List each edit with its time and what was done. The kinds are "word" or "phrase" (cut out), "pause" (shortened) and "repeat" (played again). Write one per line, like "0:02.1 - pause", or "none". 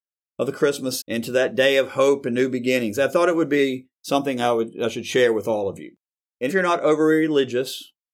0:01.0 - word
0:06.5 - word